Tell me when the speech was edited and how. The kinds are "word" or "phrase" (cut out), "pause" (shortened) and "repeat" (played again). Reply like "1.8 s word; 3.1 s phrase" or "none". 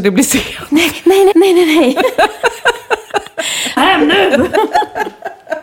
1.3 s word; 3.8 s phrase